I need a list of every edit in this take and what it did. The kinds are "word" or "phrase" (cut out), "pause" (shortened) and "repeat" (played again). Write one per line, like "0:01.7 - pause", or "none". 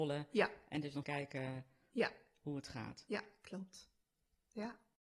0:01.0 - word